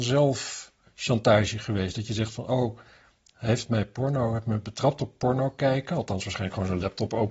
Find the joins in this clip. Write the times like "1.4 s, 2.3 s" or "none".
none